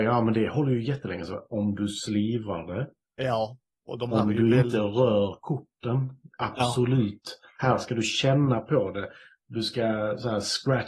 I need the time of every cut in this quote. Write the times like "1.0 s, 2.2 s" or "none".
none